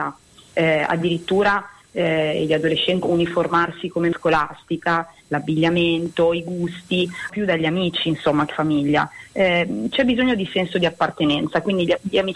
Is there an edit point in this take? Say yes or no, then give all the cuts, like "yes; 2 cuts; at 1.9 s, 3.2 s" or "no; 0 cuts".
yes; 4 cuts; at 3.0 s, 4.1 s, 7.3 s, 8.5 s